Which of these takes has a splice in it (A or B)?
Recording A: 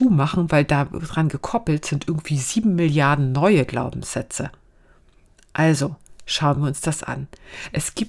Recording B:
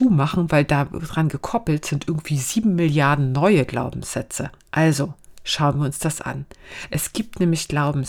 B